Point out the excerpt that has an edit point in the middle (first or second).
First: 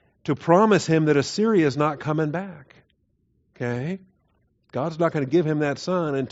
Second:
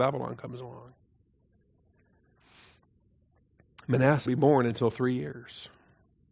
second